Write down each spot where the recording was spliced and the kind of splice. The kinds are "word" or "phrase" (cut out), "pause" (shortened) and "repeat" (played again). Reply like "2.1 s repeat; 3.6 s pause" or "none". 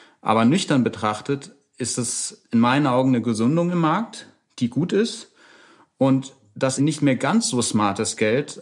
6.8 s word